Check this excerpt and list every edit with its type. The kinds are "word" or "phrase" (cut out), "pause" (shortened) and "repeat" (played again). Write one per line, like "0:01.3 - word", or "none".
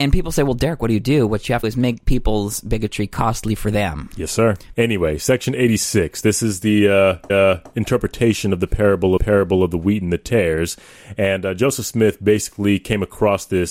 0:01.6 - phrase
0:07.3 - repeat
0:09.2 - repeat